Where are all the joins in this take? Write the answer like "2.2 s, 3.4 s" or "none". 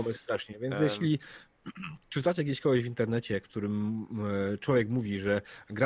none